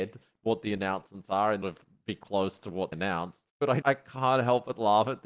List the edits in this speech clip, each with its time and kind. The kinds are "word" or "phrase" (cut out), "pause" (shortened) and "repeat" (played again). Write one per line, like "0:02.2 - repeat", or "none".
0:01.6 - phrase
0:02.9 - word
0:03.5 - pause
0:03.8 - word